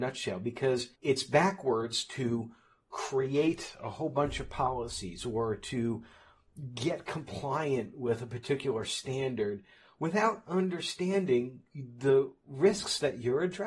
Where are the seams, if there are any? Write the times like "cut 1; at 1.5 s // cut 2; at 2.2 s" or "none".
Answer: cut 1; at 0.9 s